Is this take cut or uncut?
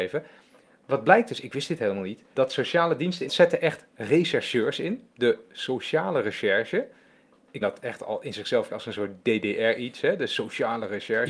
cut